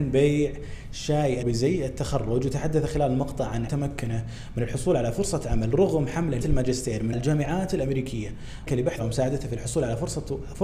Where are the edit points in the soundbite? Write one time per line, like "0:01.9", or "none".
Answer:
0:01.4
0:03.7
0:06.4
0:07.1
0:08.7
0:09.0